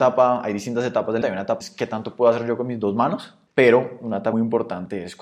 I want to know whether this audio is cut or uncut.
cut